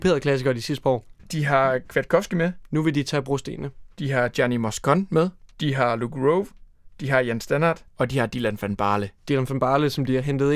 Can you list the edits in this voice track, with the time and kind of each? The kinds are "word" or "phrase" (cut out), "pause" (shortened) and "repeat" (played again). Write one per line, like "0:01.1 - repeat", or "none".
0:05.5 - pause
0:07.9 - pause